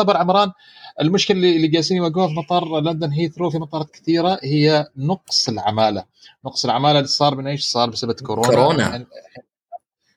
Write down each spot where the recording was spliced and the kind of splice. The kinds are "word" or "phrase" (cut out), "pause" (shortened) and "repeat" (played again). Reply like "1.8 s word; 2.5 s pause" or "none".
none